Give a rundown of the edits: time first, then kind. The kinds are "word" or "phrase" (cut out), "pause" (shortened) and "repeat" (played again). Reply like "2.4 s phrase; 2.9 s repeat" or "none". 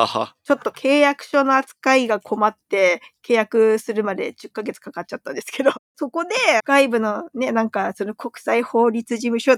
6.6 s phrase